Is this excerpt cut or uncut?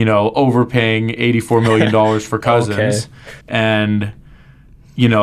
cut